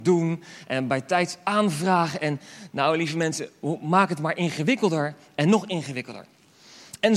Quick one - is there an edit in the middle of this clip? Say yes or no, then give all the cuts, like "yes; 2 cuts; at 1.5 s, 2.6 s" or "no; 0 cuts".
no; 0 cuts